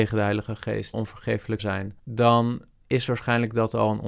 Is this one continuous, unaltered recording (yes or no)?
no